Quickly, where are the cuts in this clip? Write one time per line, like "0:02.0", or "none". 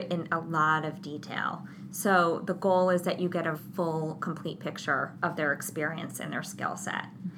0:03.5